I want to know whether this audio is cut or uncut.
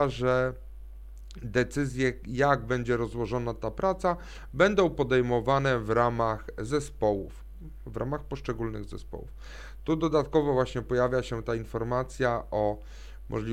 uncut